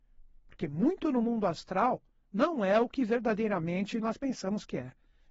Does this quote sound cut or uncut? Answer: uncut